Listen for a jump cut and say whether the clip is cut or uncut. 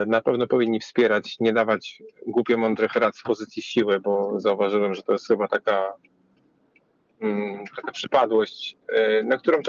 uncut